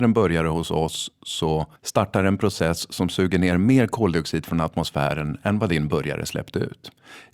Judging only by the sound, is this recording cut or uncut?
cut